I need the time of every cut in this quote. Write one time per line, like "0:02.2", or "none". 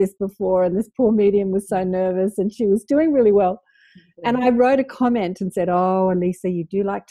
none